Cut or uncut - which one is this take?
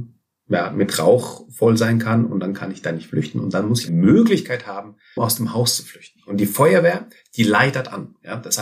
cut